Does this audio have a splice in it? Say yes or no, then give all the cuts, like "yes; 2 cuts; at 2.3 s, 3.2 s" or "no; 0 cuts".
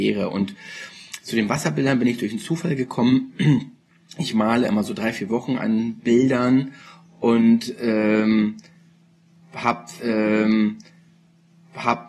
yes; 1 cut; at 10.0 s